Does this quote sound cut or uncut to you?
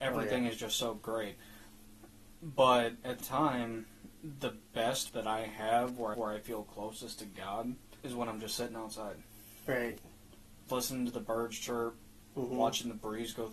cut